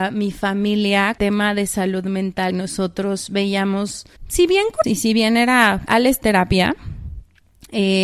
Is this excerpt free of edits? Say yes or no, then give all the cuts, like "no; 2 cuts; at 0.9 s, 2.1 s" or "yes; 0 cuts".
no; 6 cuts; at 1.2 s, 2.5 s, 4.2 s, 4.8 s, 5.9 s, 6.2 s